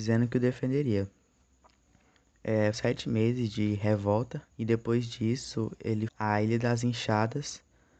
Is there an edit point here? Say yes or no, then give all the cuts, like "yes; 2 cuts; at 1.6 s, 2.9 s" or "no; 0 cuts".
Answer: yes; 3 cuts; at 2.7 s, 4.5 s, 6.1 s